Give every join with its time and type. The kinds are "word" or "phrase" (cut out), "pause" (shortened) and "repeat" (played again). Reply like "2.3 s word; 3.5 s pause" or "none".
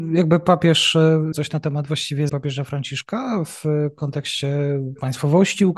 1.3 s word; 2.3 s word